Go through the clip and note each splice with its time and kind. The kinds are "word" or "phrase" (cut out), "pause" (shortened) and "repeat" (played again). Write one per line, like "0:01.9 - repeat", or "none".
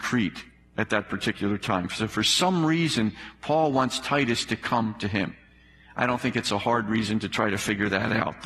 none